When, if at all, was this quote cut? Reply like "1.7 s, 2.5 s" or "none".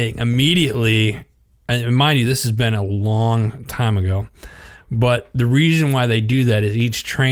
none